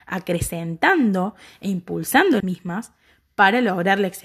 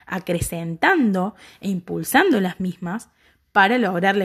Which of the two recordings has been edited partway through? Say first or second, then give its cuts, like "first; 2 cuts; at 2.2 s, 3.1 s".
first; 1 cut; at 2.4 s